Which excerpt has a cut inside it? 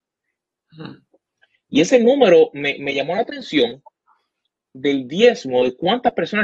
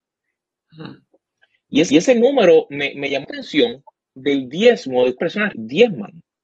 second; 5 cuts; at 1.9 s, 3.2 s, 4.0 s, 5.2 s, 5.5 s

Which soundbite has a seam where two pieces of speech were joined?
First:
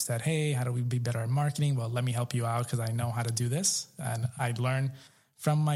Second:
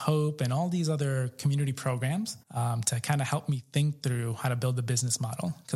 second; 1 cut; at 2.4 s

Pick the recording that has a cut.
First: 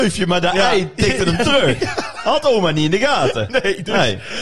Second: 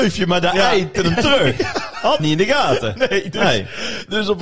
second; 2 cuts; at 0.9 s, 2.2 s

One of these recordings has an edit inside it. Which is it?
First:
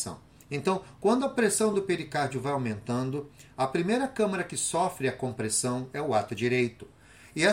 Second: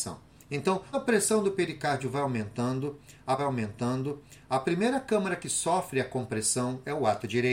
second; 2 cuts; at 0.9 s, 3.4 s

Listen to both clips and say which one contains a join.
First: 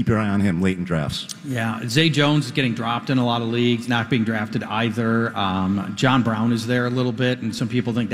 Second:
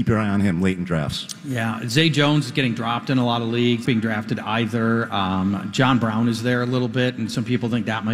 second; 1 cut; at 3.8 s

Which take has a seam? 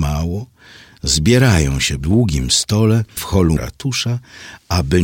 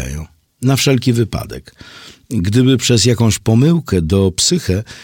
first; 3 cuts; at 2.0 s, 3.2 s, 3.6 s

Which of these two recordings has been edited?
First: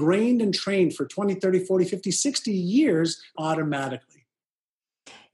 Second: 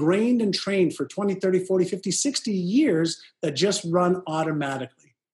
first; 1 cut; at 3.4 s

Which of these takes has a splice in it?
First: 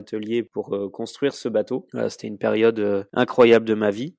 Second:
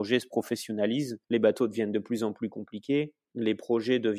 second; 1 cut; at 1.2 s

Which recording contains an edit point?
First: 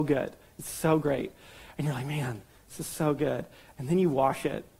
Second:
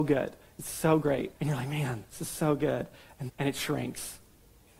second; 3 cuts; at 1.4 s, 2.1 s, 3.3 s

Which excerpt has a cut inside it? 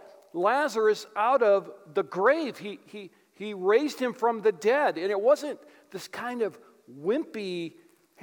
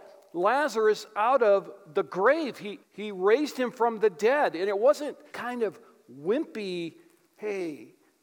second; 2 cuts; at 2.8 s, 5.3 s

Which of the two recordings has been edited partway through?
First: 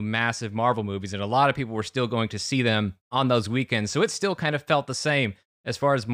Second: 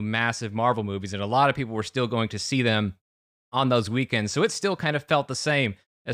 first; 1 cut; at 3.0 s

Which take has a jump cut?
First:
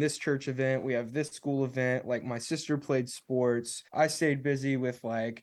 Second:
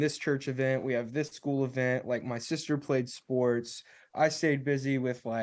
first; 1 cut; at 3.9 s

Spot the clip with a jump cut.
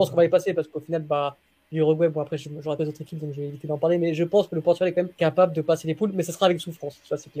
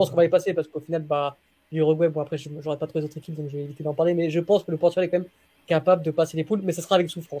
first; 2 cuts; at 2.8 s, 5.1 s

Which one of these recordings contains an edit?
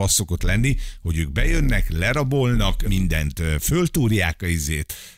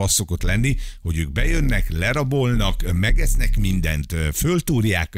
first; 1 cut; at 2.8 s

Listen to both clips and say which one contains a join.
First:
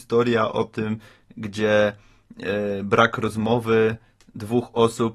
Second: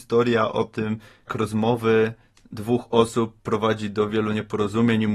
second; 3 cuts; at 1.3 s, 3.4 s, 4.1 s

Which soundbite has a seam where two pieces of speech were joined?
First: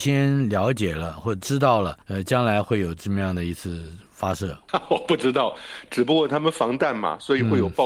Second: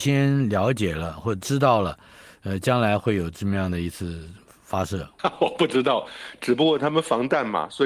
first; 2 cuts; at 2.0 s, 4.1 s

